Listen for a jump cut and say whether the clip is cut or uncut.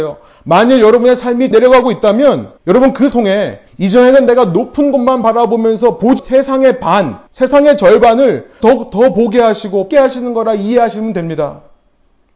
cut